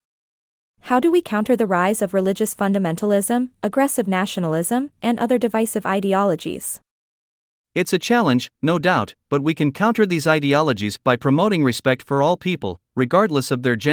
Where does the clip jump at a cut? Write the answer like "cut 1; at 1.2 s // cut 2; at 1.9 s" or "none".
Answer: none